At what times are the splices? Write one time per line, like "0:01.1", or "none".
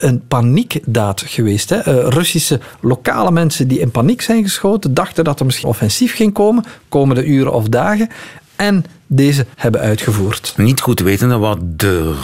0:05.6
0:09.5